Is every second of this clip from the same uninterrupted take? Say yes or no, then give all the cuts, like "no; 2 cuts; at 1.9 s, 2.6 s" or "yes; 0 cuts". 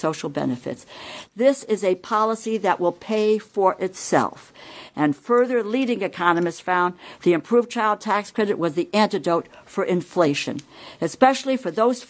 yes; 0 cuts